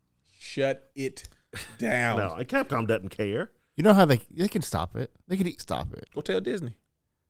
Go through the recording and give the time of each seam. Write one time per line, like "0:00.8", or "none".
0:01.7
0:05.2
0:05.6